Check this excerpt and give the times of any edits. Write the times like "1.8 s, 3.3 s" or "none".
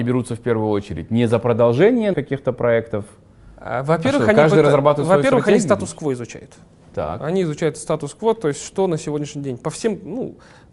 2.1 s